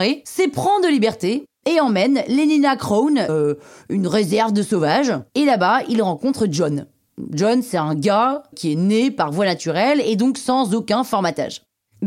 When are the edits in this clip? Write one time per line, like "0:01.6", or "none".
0:03.3
0:05.3
0:08.5